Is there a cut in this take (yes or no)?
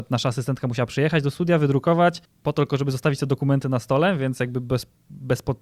yes